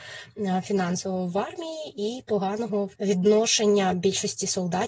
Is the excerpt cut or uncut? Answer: cut